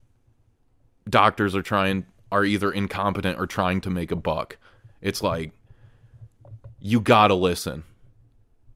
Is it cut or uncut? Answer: uncut